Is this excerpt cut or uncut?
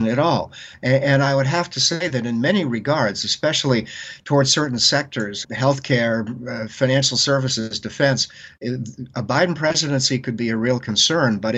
cut